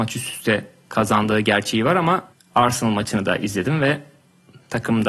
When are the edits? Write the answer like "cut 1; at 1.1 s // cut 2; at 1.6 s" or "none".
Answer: cut 1; at 2.3 s